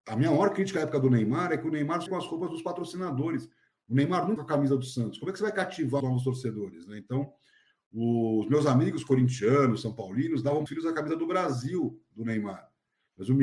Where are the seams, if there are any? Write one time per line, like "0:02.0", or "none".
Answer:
0:02.1
0:04.4
0:06.0
0:10.7